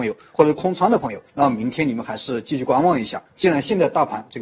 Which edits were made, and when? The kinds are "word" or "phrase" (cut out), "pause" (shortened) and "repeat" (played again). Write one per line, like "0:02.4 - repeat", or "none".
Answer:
0:01.3 - pause
0:03.3 - pause